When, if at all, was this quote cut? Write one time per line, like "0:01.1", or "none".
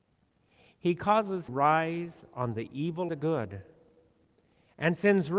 0:01.5
0:03.1